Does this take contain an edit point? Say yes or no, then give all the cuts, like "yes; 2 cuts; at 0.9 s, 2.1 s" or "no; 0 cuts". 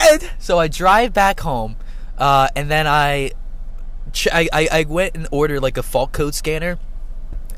no; 0 cuts